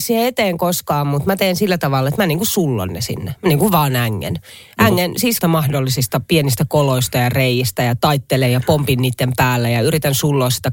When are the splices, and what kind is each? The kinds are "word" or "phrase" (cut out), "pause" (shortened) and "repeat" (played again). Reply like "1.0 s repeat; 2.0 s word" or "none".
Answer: 5.4 s word